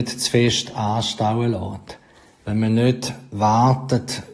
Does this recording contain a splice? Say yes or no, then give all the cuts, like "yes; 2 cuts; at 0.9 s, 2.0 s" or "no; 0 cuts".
no; 0 cuts